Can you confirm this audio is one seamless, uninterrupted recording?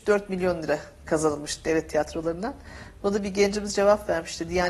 yes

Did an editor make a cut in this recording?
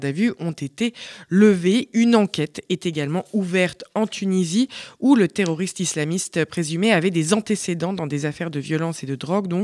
no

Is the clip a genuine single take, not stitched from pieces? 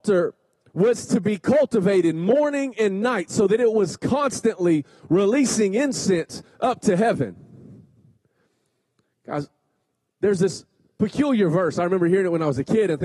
yes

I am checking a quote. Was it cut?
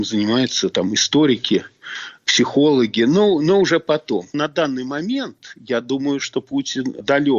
yes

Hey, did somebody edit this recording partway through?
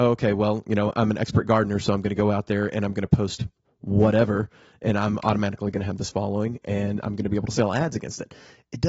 no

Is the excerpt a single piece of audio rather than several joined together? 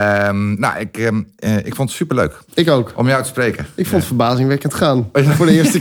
no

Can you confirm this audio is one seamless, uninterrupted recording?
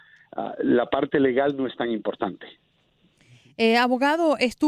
yes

